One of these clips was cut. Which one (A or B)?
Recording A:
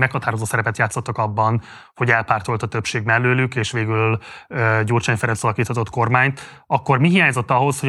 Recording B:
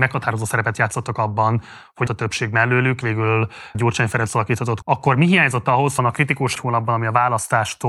B